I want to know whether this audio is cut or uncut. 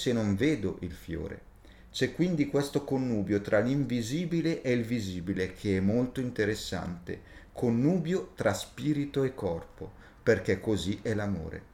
uncut